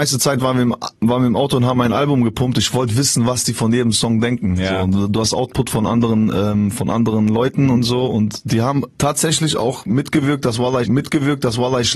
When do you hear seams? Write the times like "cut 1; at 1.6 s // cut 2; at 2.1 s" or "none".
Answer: cut 1; at 8.9 s // cut 2; at 10.8 s